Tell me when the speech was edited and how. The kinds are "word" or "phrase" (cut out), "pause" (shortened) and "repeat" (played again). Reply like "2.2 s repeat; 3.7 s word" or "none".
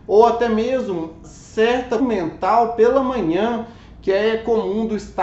1.2 s word; 2.0 s word